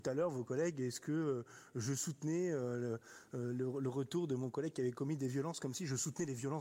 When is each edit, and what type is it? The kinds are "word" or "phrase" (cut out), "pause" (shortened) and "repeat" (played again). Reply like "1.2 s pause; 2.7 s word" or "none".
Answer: none